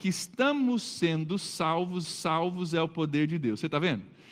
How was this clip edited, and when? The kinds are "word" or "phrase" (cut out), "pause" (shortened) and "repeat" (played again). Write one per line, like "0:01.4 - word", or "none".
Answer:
0:02.0 - repeat